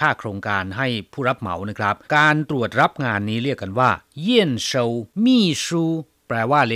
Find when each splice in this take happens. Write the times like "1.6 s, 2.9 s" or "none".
2.0 s, 5.1 s

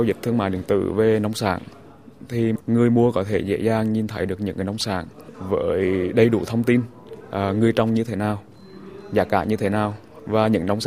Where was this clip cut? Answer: none

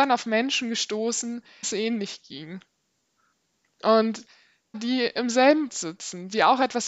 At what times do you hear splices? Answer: 1.6 s, 4.7 s, 5.7 s

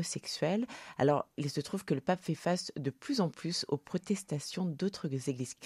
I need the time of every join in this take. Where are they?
none

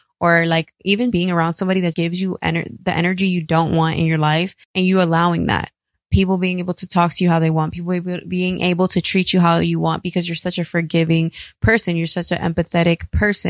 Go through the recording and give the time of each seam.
1.1 s, 1.9 s, 4.6 s

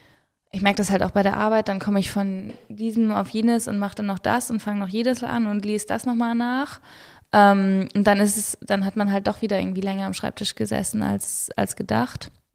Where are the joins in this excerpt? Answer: none

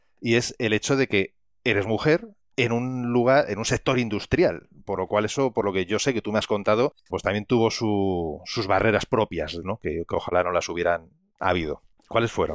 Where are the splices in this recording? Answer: 7.1 s, 9.6 s

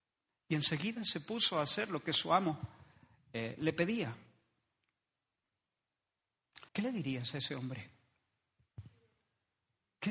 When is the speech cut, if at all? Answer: 6.7 s

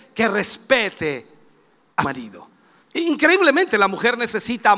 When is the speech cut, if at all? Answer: 2.0 s, 2.8 s

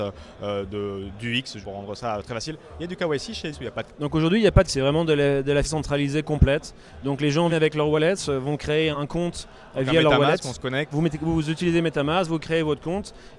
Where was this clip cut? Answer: 1.6 s, 3.5 s, 3.9 s, 4.7 s, 5.6 s, 7.5 s, 8.9 s, 10.9 s

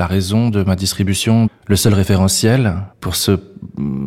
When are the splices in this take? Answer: 1.5 s, 2.9 s

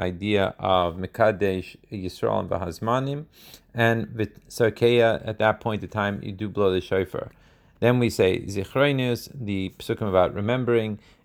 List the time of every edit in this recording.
none

